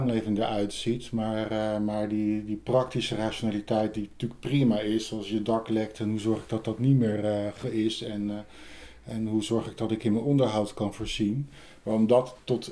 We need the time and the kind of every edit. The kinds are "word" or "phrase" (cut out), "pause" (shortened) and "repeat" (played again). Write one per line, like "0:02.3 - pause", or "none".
none

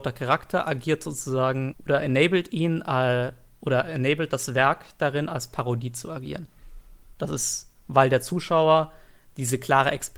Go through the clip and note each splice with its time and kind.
0:01.7 - word

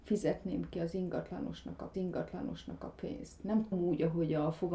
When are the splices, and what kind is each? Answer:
0:01.9 - repeat
0:03.7 - word

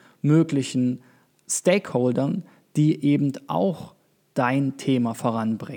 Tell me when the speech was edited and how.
none

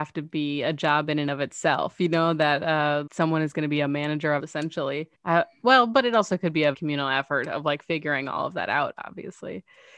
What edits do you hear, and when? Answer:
0:03.1 - word
0:04.4 - phrase
0:05.1 - pause
0:06.7 - word

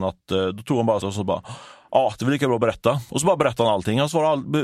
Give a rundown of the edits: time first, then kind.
0:01.0 - phrase

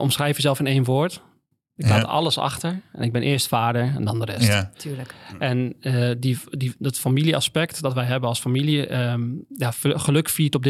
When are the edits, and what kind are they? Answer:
none

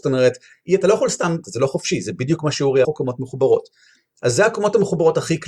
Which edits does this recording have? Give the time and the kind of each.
0:01.4 - phrase
0:02.8 - phrase

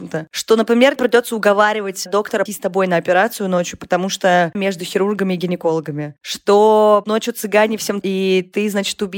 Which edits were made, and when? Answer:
0:01.0 - word
0:02.5 - word
0:04.5 - word
0:07.0 - word
0:08.0 - word

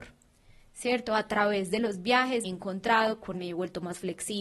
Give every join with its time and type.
0:02.4 - word
0:03.3 - word

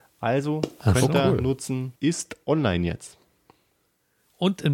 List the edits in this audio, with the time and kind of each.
0:02.0 - pause

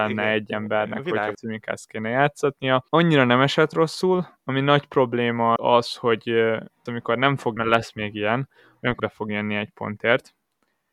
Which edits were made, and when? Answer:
0:01.3 - word
0:02.9 - pause
0:05.6 - word
0:06.9 - word
0:07.6 - word
0:09.0 - word

